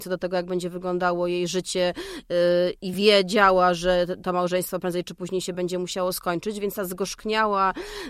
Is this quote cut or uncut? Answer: uncut